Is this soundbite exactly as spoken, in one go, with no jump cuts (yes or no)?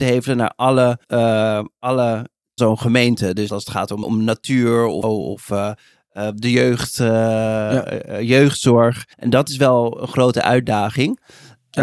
no